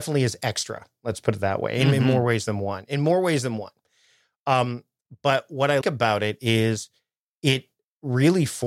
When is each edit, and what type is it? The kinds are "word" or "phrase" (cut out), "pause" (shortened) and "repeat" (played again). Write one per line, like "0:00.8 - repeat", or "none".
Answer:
0:05.8 - word